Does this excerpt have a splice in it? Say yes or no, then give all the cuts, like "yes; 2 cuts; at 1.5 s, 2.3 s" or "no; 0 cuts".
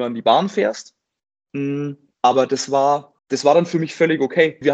yes; 2 cuts; at 2.1 s, 3.2 s